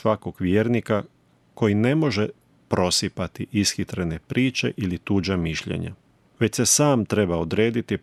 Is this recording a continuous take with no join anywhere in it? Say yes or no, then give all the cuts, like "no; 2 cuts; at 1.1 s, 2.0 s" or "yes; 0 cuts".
yes; 0 cuts